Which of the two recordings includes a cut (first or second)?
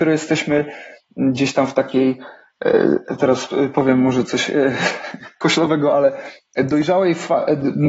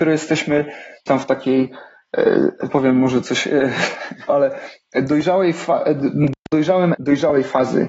second